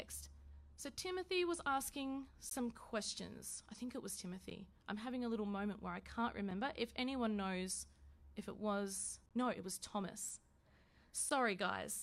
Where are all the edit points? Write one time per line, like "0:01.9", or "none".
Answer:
0:09.3